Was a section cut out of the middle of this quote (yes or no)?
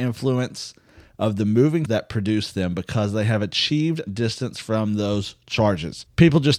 yes